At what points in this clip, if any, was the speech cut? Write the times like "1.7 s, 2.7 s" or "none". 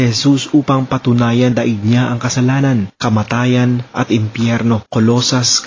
1.5 s